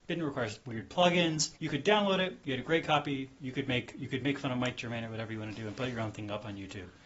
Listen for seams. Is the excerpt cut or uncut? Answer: cut